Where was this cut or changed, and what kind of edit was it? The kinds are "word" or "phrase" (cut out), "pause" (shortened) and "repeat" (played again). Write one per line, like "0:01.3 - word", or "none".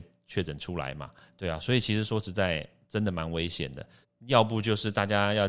0:01.2 - pause
0:04.0 - pause